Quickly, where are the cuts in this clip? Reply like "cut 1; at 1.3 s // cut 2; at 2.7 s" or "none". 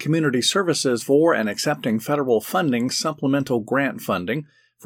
cut 1; at 1.0 s